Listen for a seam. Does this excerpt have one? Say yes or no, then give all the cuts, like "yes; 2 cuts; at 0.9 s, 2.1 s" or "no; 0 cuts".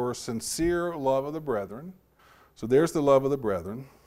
yes; 1 cut; at 2.2 s